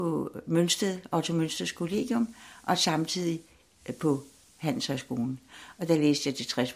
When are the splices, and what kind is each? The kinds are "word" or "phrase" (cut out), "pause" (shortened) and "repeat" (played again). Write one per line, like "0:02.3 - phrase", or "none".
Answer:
none